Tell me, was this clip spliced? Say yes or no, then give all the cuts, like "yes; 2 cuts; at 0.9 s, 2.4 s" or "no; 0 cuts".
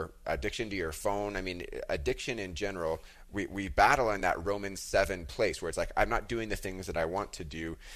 no; 0 cuts